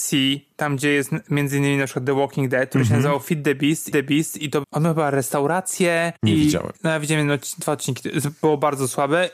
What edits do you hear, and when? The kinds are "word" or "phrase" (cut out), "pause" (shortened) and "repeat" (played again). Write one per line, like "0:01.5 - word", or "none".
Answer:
0:03.9 - repeat
0:04.6 - word